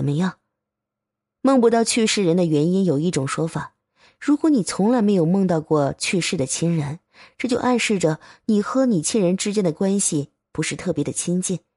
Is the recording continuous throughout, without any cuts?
yes; 0 cuts

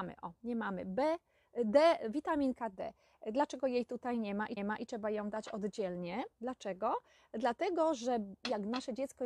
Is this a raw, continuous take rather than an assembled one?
no; 2 cuts; at 4.6 s, 6.3 s

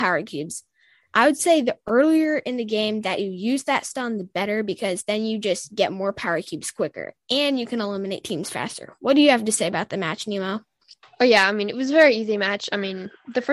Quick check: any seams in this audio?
no; 0 cuts

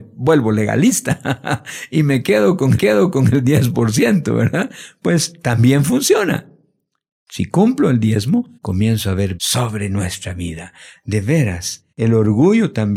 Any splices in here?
yes; 4 cuts; at 2.8 s, 8.6 s, 9.4 s, 11.9 s

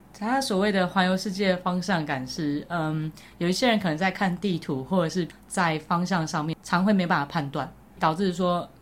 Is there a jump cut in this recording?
no; 0 cuts

